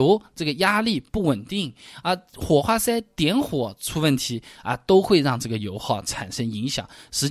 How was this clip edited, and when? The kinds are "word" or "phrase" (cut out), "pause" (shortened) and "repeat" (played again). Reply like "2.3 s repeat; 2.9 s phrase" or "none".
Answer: none